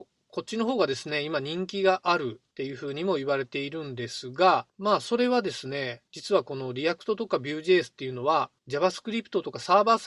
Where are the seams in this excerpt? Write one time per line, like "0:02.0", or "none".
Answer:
0:02.5
0:04.7
0:06.1
0:08.6